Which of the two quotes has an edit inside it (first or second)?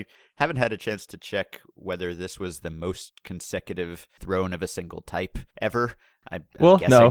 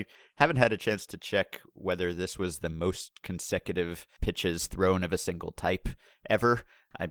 first